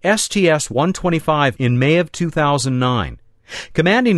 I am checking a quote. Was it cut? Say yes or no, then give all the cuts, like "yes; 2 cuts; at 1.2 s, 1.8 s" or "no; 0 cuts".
yes; 1 cut; at 1.6 s